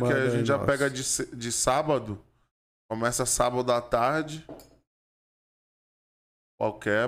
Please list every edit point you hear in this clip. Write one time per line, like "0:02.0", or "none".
none